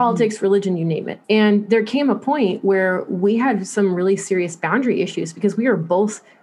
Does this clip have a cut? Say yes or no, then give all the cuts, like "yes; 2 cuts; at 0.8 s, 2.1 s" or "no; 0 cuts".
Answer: yes; 1 cut; at 1.2 s